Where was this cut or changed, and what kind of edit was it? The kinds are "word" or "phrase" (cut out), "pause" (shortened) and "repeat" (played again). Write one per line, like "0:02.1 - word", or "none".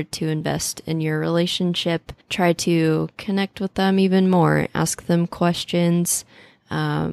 0:02.2 - pause